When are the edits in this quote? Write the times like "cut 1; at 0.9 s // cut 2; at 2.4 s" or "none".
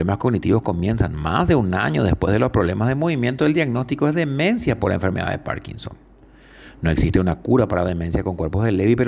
none